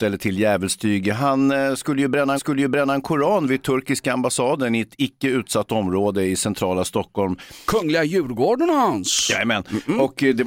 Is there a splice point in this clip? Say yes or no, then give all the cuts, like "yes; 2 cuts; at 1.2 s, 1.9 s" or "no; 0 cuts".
yes; 1 cut; at 2.4 s